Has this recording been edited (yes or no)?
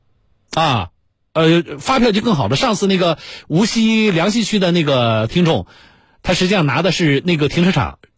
no